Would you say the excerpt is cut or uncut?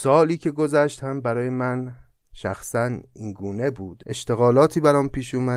uncut